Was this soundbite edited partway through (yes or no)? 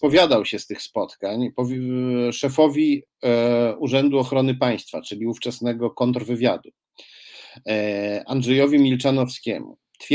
no